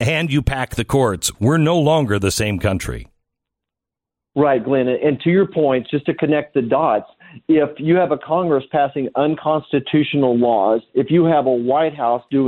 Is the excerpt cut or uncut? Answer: uncut